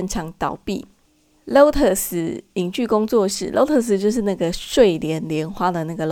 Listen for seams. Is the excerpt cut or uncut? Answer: uncut